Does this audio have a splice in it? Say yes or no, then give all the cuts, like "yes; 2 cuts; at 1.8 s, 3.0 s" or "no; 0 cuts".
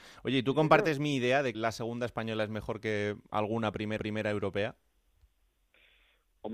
yes; 2 cuts; at 1.5 s, 4.0 s